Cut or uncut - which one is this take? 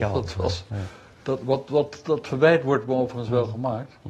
uncut